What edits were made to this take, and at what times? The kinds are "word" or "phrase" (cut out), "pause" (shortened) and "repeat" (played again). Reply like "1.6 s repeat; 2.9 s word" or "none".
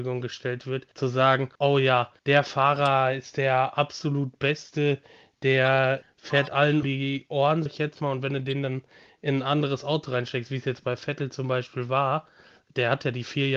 0.9 s pause; 1.5 s pause; 2.2 s pause; 6.0 s word; 6.8 s word; 7.7 s word